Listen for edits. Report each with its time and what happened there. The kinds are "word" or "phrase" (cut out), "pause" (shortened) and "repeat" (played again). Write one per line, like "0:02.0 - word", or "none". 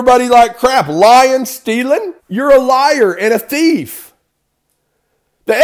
0:02.2 - pause